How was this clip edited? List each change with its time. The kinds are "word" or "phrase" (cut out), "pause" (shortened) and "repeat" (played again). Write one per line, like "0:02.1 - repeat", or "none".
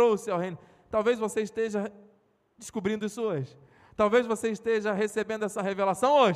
none

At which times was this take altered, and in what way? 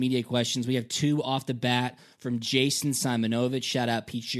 none

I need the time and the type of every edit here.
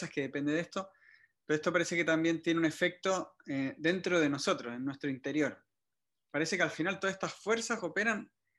none

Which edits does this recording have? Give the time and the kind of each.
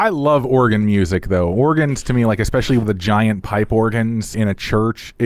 0:02.8 - phrase
0:04.3 - word

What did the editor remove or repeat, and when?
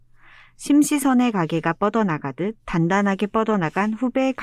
none

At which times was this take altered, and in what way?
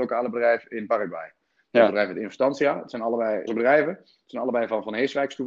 0:03.5 - word

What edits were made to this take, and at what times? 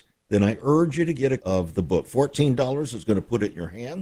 0:01.4 - word

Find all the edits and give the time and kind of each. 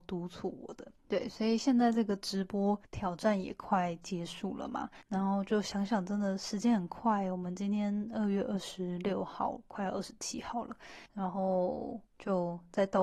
0:01.0 - pause
0:02.8 - pause
0:05.0 - pause
0:11.1 - pause
0:12.1 - pause

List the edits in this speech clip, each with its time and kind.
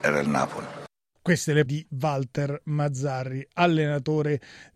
0:01.7 - word

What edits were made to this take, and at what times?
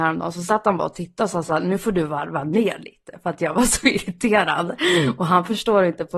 none

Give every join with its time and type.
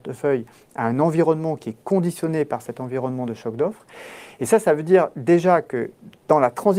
none

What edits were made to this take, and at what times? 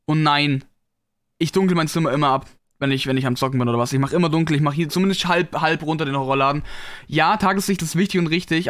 0:02.6 - pause

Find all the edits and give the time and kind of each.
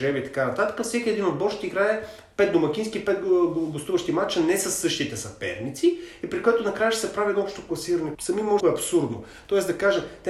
0:08.1 - word
0:08.6 - phrase

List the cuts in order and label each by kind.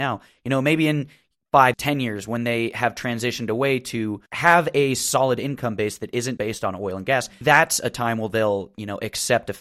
0:01.7 - word
0:04.3 - pause
0:06.4 - word
0:07.4 - word

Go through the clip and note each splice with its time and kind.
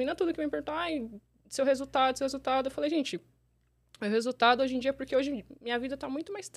none

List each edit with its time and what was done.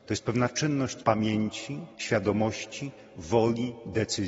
0:01.0 - word
0:01.9 - pause

